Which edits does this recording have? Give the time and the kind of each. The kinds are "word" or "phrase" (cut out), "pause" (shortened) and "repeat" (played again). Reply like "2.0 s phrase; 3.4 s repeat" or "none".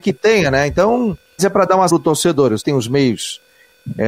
1.4 s word; 1.9 s word; 2.6 s word